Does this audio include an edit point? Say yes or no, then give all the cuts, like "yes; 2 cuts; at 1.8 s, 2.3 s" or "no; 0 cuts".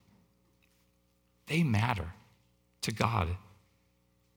no; 0 cuts